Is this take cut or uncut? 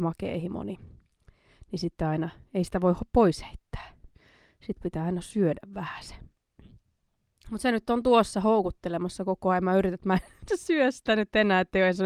uncut